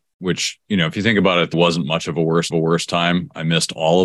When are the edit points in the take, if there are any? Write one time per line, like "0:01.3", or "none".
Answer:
0:01.5
0:02.5